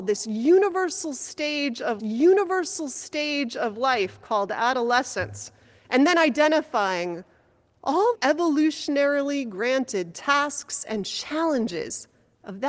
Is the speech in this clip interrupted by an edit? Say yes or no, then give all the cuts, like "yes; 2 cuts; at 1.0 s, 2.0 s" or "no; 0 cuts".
yes; 3 cuts; at 2.0 s, 5.6 s, 8.1 s